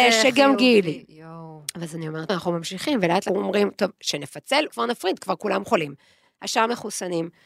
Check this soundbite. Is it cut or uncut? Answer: cut